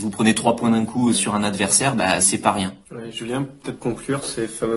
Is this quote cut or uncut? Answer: cut